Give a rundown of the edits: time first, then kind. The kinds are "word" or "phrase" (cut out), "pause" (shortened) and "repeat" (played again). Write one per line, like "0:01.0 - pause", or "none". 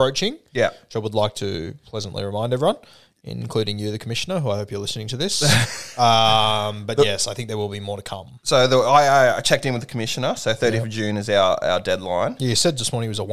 none